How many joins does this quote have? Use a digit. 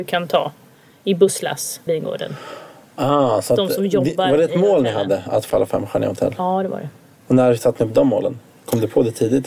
2